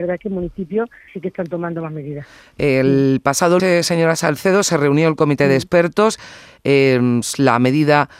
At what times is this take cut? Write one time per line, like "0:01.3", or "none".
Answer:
0:01.1
0:03.6

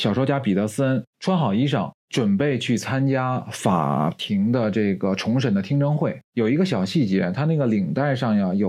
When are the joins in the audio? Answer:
0:01.1
0:06.2

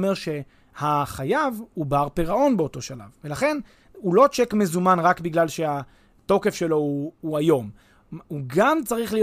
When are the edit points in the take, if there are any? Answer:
none

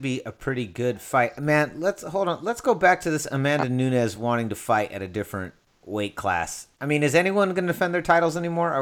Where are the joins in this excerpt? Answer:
none

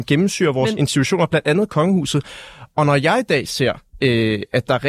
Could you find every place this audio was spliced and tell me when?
none

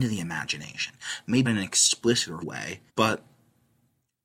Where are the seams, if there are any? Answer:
0:01.4
0:02.4
0:02.9

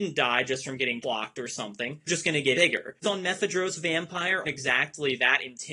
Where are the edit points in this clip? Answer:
0:01.0
0:02.1
0:02.5
0:03.0
0:04.4

